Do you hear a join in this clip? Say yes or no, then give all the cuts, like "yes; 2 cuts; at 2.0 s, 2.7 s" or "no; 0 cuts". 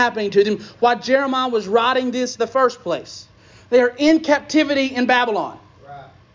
yes; 2 cuts; at 2.4 s, 3.4 s